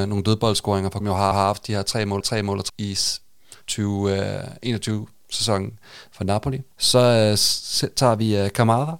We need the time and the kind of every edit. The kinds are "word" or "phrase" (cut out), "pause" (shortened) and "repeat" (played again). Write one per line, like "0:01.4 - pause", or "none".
0:01.0 - phrase
0:01.3 - repeat
0:02.2 - repeat
0:02.7 - word
0:03.6 - pause
0:06.7 - pause